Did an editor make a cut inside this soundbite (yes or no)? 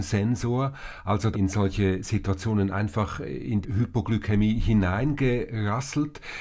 yes